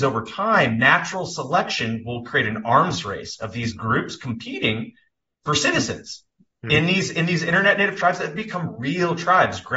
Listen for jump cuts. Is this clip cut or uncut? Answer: uncut